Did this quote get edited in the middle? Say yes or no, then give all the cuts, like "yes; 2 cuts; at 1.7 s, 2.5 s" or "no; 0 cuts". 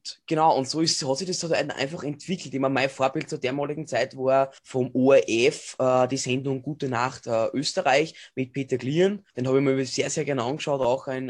yes; 2 cuts; at 4.6 s, 9.3 s